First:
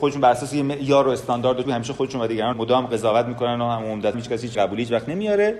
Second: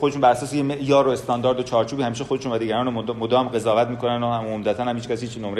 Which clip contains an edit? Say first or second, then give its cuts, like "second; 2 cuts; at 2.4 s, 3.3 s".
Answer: first; 4 cuts; at 1.6 s, 2.5 s, 4.1 s, 4.5 s